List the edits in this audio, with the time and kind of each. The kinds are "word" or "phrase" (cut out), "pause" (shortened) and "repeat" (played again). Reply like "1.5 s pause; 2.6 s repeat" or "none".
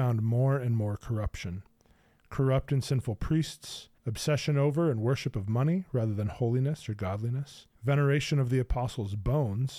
4.0 s pause; 7.7 s pause

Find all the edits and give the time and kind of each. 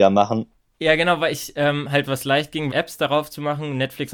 2.1 s word; 2.7 s phrase

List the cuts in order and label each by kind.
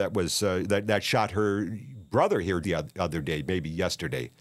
2.6 s word

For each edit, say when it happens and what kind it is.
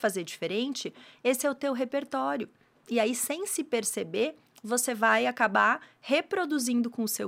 none

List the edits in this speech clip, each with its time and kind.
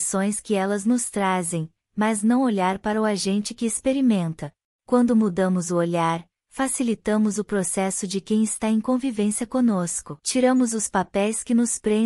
4.7 s pause; 10.2 s pause

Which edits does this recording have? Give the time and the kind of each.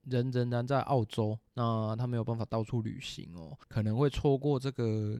1.5 s pause; 3.6 s pause

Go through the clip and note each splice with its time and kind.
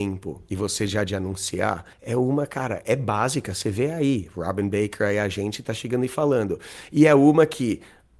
1.9 s pause

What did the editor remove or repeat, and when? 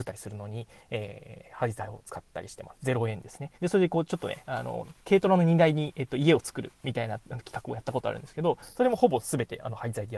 3.5 s pause

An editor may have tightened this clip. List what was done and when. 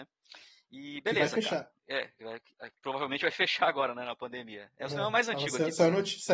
1.8 s pause

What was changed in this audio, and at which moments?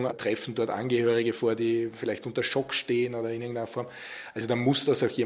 none

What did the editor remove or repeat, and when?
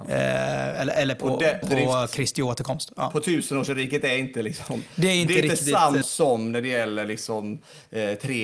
1.6 s word; 6.0 s word

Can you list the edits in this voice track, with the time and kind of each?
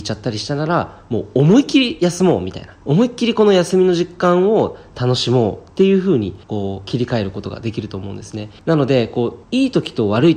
2.8 s pause; 6.4 s pause; 8.6 s pause; 9.4 s pause

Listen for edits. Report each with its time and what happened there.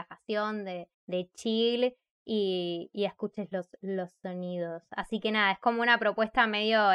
0.9 s pause

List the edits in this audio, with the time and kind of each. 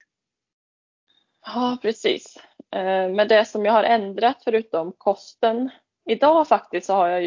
none

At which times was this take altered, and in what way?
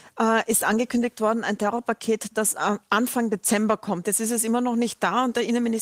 none

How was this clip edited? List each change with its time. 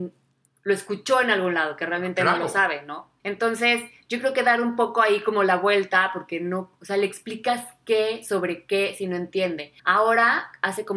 3.2 s pause; 9.8 s pause

